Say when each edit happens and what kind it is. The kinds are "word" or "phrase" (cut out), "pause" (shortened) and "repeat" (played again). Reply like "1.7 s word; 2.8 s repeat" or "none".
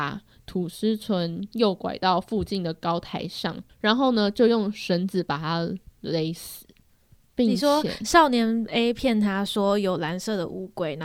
none